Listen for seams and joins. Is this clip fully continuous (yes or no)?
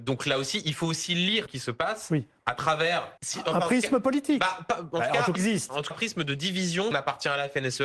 no